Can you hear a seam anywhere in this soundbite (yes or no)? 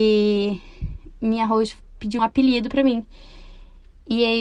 yes